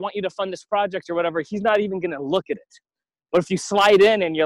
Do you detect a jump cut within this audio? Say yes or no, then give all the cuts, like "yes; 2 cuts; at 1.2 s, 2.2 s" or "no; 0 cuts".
no; 0 cuts